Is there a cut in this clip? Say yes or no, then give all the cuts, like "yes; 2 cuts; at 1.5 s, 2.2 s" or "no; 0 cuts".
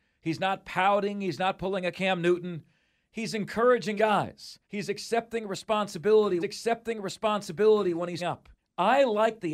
yes; 5 cuts; at 4.0 s, 4.6 s, 6.4 s, 8.2 s, 8.6 s